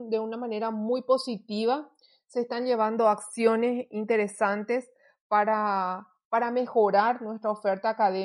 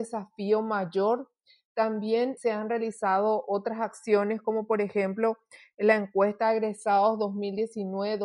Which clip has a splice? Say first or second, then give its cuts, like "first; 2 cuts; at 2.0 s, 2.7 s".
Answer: second; 1 cut; at 2.4 s